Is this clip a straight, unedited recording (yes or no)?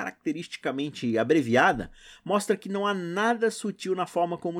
yes